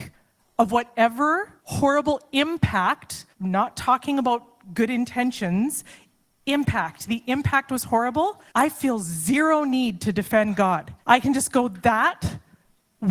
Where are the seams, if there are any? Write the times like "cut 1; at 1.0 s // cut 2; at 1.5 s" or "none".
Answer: cut 1; at 1.6 s // cut 2; at 3.3 s // cut 3; at 8.5 s // cut 4; at 11.0 s